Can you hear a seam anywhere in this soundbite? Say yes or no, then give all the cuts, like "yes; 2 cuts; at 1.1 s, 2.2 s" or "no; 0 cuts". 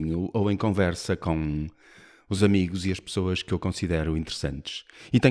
no; 0 cuts